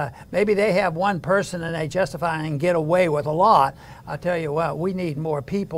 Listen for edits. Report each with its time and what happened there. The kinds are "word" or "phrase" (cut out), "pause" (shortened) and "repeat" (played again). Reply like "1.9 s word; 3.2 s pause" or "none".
none